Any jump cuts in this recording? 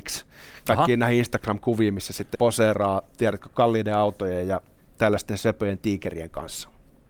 yes; 1 cut; at 2.3 s

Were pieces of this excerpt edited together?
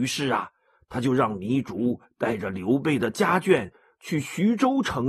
no; 0 cuts

